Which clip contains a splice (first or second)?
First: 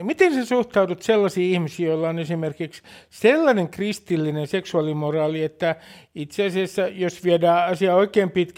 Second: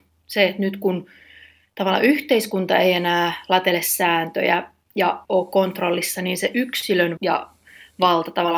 second